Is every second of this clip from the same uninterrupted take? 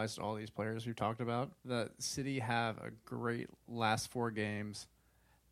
no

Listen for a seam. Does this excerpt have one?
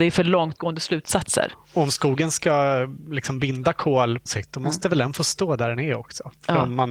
yes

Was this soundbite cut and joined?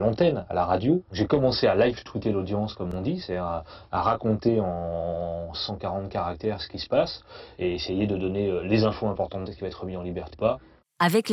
yes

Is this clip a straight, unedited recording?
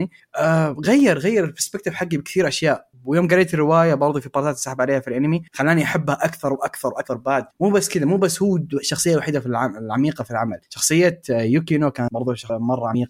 no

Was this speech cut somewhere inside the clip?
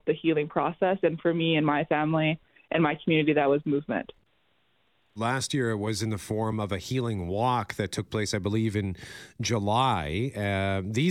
no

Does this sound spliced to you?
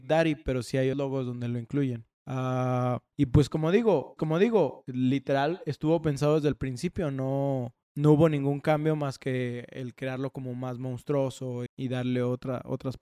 yes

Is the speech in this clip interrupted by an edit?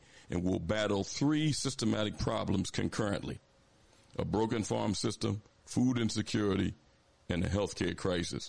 no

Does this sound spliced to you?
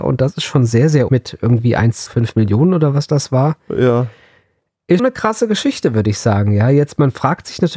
yes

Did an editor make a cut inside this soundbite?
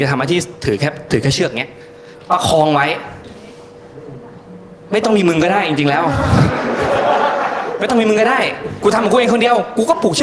no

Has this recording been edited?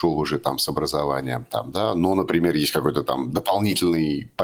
no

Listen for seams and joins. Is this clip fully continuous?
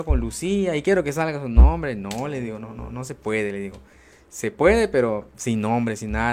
yes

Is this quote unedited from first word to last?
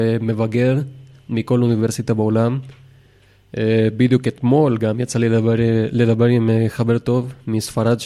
yes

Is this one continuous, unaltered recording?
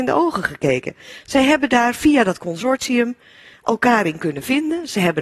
yes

